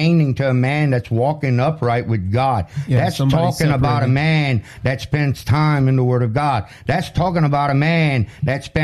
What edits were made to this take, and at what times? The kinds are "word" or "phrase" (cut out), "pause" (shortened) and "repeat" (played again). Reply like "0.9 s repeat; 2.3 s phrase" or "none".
none